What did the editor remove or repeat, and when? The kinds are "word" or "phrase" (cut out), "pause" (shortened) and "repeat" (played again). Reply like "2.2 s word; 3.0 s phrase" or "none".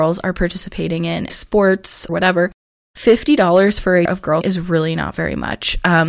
1.3 s word; 2.1 s phrase; 4.1 s word; 4.4 s word